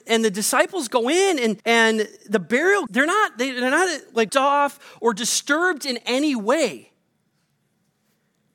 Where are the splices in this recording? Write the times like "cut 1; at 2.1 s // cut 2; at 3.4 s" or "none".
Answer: cut 1; at 1.6 s // cut 2; at 2.9 s // cut 3; at 4.3 s